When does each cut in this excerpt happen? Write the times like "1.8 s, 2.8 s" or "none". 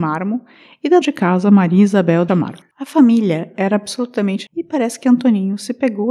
1.0 s, 2.3 s, 4.5 s